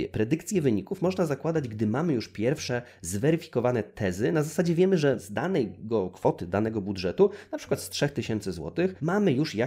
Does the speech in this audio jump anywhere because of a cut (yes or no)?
no